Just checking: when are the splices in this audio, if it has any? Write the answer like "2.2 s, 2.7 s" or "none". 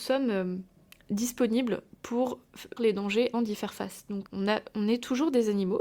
2.8 s, 3.3 s, 4.3 s